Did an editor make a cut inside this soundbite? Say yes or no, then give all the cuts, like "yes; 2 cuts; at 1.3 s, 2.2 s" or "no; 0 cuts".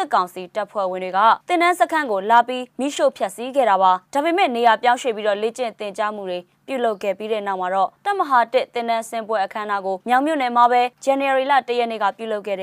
yes; 6 cuts; at 1.4 s, 2.7 s, 4.1 s, 8.0 s, 10.0 s, 10.9 s